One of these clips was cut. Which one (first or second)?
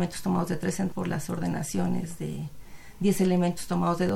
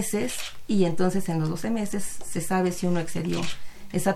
first